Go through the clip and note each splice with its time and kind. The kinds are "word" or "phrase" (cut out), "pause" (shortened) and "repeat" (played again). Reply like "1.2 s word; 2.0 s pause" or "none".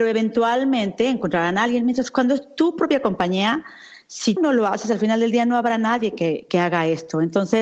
4.4 s word; 6.5 s word